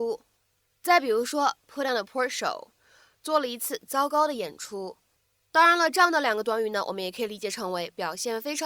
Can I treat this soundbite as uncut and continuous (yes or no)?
yes